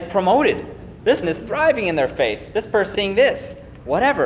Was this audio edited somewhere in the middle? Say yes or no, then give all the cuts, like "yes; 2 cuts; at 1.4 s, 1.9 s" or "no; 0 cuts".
yes; 2 cuts; at 1.2 s, 2.9 s